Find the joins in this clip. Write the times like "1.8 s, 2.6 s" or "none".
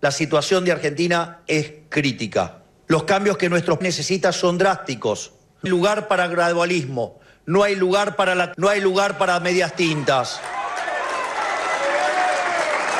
3.8 s, 5.7 s, 8.5 s